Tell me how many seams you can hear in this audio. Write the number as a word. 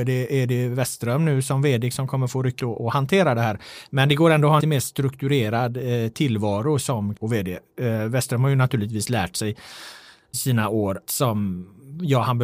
six